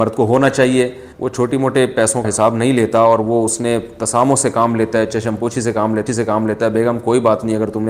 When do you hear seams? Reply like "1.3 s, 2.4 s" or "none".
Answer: 1.1 s, 2.2 s, 6.1 s